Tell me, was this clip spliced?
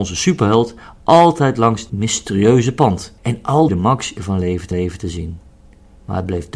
yes; 5 cuts; at 1.9 s, 3.2 s, 3.7 s, 4.2 s, 4.7 s

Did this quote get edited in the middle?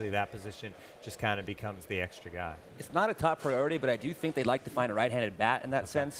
no; 0 cuts

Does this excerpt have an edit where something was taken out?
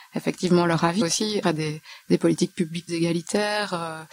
yes; 3 cuts; at 1.0 s, 1.4 s, 2.9 s

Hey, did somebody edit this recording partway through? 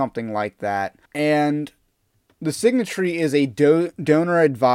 yes; 1 cut; at 1.1 s

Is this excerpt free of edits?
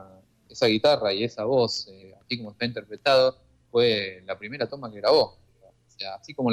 yes; 0 cuts

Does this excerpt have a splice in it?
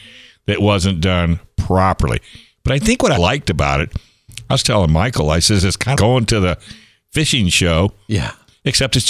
yes; 2 cuts; at 3.2 s, 6.0 s

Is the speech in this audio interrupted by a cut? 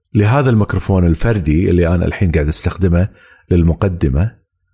no; 0 cuts

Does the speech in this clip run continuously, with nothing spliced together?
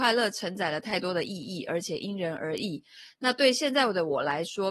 yes; 0 cuts

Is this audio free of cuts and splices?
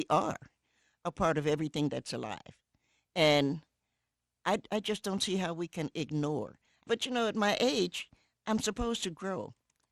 yes; 0 cuts

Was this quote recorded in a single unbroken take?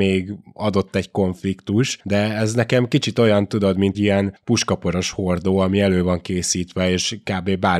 no; 1 cut; at 3.9 s

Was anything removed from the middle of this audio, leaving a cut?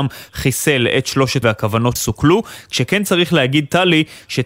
yes; 2 cuts; at 1.4 s, 2.0 s

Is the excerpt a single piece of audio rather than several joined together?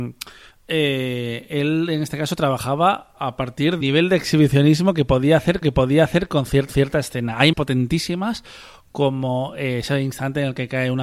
no; 5 cuts; at 3.2 s, 3.8 s, 5.6 s, 6.7 s, 7.5 s

